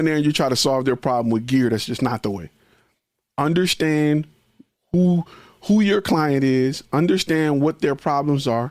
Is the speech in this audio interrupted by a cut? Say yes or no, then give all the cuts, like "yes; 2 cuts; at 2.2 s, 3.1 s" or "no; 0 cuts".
no; 0 cuts